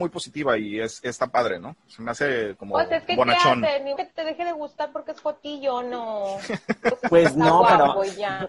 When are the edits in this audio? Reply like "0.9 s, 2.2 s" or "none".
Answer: 1.8 s, 4.0 s